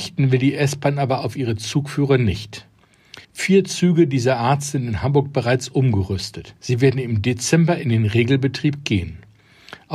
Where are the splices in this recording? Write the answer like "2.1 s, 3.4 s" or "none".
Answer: 3.2 s, 6.6 s